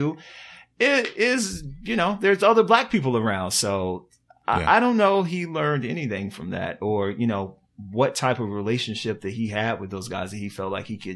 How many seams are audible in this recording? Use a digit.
0